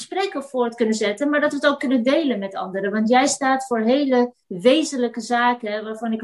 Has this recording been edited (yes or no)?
yes